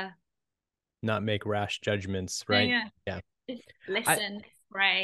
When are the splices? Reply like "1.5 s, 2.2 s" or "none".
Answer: none